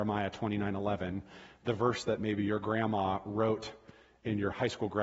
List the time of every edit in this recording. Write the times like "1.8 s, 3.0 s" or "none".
none